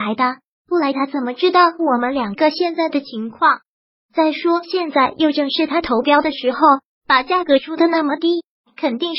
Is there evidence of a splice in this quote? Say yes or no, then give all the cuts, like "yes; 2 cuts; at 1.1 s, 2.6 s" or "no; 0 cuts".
no; 0 cuts